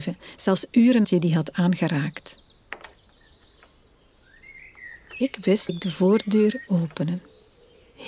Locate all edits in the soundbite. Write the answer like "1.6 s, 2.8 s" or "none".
1.0 s, 5.7 s, 6.7 s